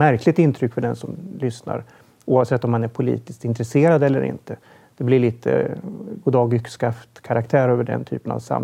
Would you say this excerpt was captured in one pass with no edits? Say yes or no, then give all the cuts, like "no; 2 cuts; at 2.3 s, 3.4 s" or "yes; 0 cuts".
yes; 0 cuts